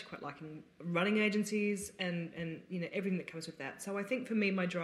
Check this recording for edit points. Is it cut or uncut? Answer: uncut